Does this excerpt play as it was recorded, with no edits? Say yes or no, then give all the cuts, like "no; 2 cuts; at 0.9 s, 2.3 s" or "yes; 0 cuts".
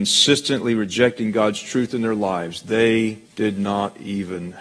no; 1 cut; at 3.3 s